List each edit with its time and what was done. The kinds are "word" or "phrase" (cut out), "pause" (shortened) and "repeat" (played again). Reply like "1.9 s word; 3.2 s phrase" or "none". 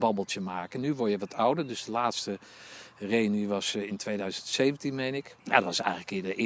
5.4 s pause